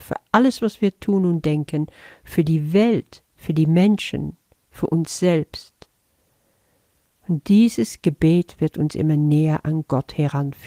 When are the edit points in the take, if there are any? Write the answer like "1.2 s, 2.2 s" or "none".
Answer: none